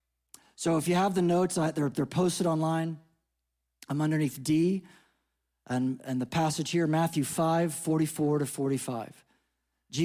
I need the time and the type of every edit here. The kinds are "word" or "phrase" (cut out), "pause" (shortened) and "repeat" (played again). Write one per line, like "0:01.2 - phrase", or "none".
none